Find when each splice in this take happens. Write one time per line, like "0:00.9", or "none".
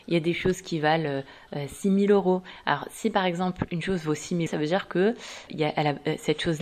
0:04.5
0:05.5